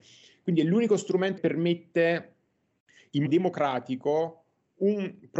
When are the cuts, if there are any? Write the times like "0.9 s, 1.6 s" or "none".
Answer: 1.4 s, 3.3 s